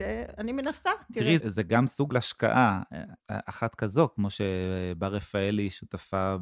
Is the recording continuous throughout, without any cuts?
no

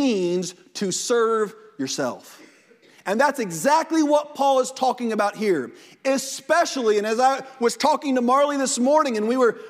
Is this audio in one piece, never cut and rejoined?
yes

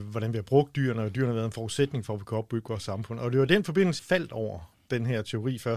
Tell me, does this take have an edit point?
yes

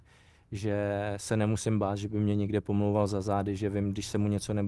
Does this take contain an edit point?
no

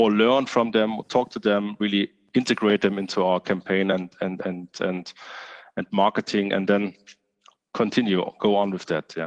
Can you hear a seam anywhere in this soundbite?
no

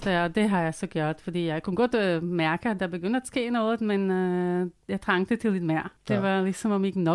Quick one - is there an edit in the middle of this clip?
yes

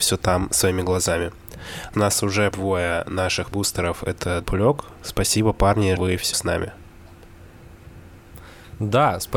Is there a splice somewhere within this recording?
yes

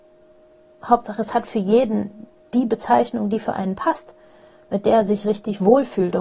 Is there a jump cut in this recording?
no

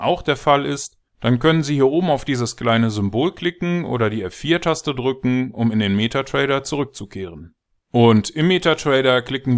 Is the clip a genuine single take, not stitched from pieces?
no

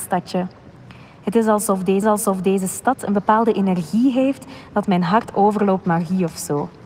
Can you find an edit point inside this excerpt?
yes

